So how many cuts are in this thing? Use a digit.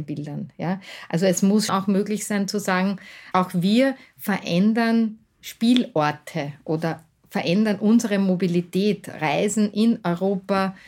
2